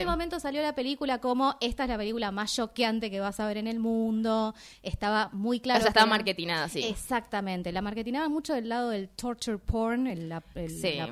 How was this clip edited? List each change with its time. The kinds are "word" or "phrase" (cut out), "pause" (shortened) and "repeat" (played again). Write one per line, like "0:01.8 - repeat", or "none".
none